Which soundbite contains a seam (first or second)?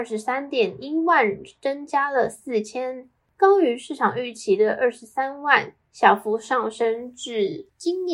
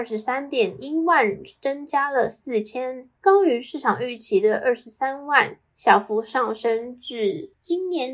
second